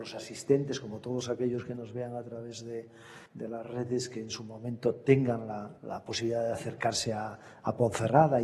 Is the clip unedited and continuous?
no; 2 cuts; at 3.3 s, 5.8 s

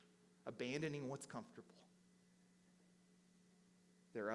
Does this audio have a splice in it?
no; 0 cuts

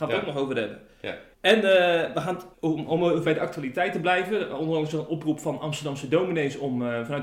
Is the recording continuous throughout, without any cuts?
no; 3 cuts; at 1.3 s, 2.5 s, 3.2 s

